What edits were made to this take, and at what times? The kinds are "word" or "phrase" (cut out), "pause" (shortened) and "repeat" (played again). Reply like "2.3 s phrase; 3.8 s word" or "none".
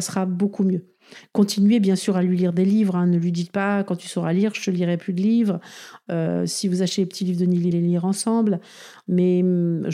7.7 s phrase